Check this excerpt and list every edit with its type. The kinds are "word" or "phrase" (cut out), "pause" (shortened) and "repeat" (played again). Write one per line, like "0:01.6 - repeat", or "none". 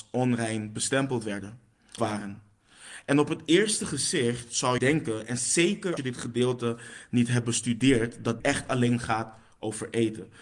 0:02.0 - word
0:04.8 - word
0:06.0 - word
0:08.4 - word